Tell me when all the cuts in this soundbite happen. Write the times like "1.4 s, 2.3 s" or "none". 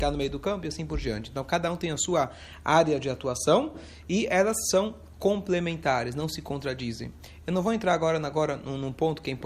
none